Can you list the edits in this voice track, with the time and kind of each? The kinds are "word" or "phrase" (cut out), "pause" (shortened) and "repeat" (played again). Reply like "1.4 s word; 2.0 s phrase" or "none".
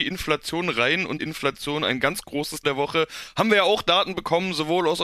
1.2 s phrase; 2.6 s word